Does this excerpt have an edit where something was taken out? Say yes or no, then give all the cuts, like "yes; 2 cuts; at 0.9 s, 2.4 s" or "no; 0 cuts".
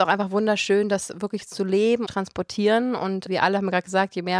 yes; 2 cuts; at 2.1 s, 3.3 s